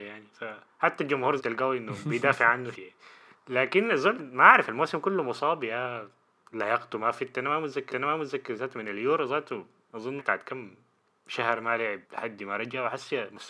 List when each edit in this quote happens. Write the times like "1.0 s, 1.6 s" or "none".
1.4 s, 2.7 s, 3.3 s, 4.2 s, 6.4 s, 7.9 s, 10.2 s, 12.0 s